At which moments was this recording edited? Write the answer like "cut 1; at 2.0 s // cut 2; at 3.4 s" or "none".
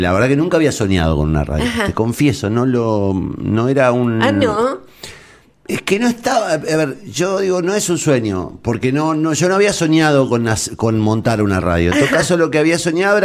none

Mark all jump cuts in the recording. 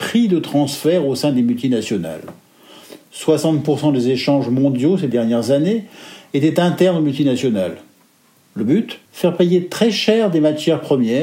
cut 1; at 9.1 s

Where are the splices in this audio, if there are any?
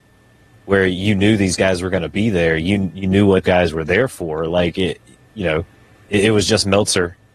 cut 1; at 3.4 s

